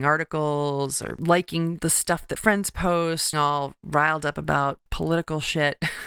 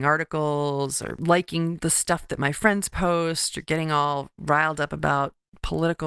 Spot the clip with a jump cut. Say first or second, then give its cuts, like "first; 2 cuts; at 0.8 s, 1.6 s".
first; 3 cuts; at 2.4 s, 3.3 s, 4.9 s